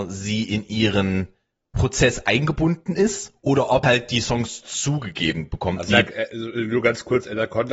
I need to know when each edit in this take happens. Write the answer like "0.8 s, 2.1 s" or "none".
3.8 s, 5.9 s